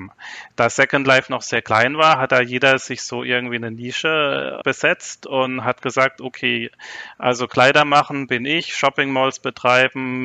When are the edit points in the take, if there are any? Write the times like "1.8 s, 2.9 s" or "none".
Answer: none